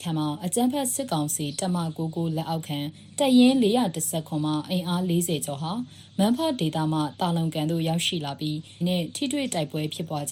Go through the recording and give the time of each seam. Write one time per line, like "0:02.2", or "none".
0:08.8